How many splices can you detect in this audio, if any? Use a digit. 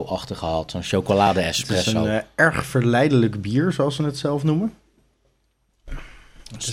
0